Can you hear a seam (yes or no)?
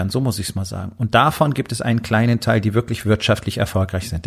no